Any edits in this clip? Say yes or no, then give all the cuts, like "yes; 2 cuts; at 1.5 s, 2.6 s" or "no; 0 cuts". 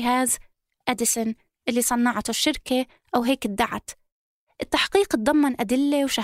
no; 0 cuts